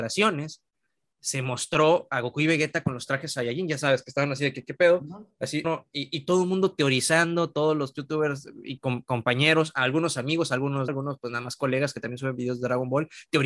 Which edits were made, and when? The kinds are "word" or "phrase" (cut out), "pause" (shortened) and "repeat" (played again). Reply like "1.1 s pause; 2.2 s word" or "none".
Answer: 5.6 s word; 8.8 s word; 10.9 s word